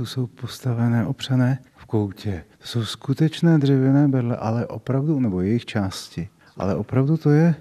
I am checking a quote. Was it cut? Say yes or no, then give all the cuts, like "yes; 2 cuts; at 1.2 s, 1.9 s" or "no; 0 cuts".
yes; 3 cuts; at 1.7 s, 2.5 s, 6.4 s